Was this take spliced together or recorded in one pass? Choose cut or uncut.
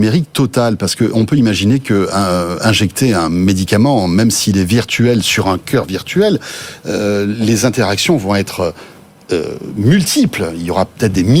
uncut